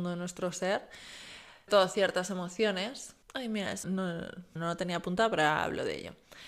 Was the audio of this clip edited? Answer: yes; 4 cuts; at 1.7 s, 3.2 s, 3.8 s, 4.6 s

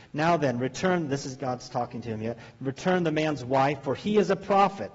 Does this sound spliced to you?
no; 0 cuts

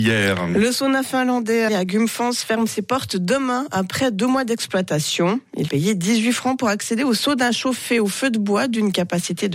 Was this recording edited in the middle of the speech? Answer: yes; 2 cuts; at 1.7 s, 5.7 s

